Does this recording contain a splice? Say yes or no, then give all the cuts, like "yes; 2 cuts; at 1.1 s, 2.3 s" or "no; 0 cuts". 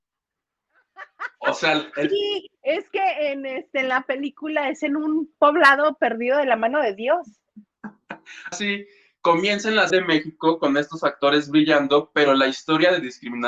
yes; 2 cuts; at 8.5 s, 9.9 s